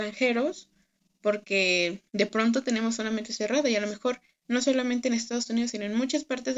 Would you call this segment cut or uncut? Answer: cut